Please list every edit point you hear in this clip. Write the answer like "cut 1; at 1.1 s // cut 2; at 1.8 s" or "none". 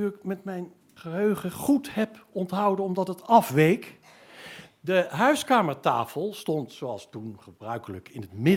cut 1; at 1.0 s